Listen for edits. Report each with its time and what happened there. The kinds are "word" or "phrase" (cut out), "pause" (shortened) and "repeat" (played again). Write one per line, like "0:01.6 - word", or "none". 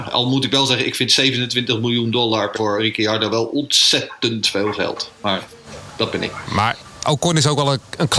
0:02.6 - word